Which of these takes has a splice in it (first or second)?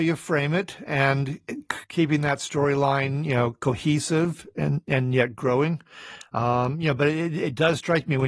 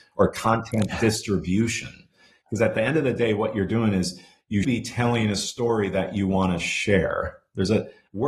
second